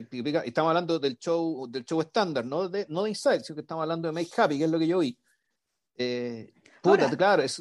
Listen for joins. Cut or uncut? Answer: uncut